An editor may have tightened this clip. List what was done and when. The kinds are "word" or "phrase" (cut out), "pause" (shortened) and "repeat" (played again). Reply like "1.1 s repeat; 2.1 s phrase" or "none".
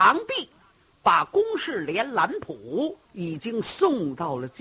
3.0 s pause